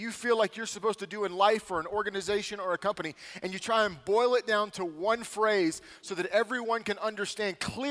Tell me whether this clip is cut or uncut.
uncut